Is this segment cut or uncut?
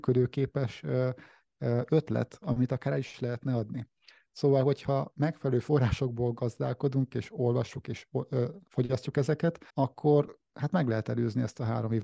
cut